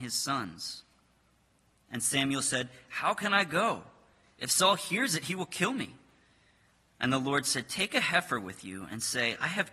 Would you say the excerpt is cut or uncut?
uncut